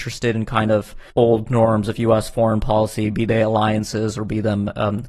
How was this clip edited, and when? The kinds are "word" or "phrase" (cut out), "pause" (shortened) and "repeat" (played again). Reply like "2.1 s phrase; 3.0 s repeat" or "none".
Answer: 1.1 s pause